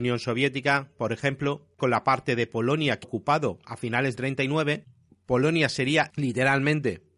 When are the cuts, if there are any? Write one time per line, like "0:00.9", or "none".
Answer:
0:01.8
0:03.0
0:04.1
0:06.1